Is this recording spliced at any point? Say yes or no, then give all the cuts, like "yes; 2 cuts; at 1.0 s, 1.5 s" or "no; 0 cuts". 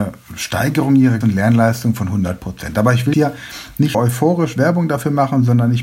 yes; 3 cuts; at 1.2 s, 3.1 s, 3.9 s